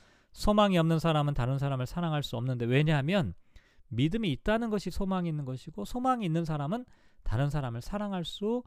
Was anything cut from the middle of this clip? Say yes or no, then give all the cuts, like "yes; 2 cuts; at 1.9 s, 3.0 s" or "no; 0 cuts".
no; 0 cuts